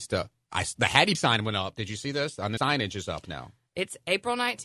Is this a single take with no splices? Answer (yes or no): no